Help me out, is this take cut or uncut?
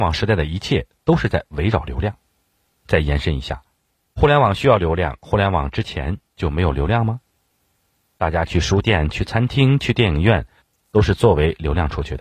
uncut